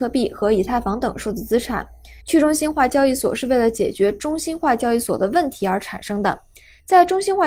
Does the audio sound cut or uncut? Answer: cut